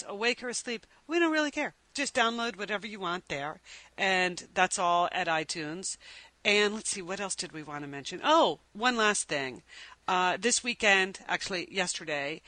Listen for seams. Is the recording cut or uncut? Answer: cut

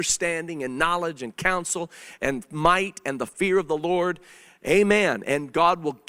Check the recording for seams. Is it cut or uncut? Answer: uncut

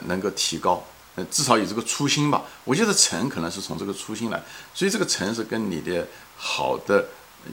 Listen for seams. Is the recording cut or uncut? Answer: cut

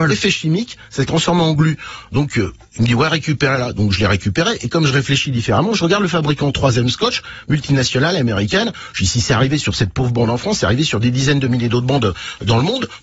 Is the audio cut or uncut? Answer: uncut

